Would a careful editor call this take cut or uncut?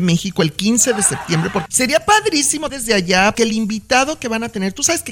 cut